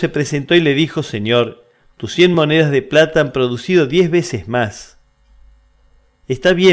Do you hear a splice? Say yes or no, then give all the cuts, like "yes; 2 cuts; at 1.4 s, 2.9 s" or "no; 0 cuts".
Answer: no; 0 cuts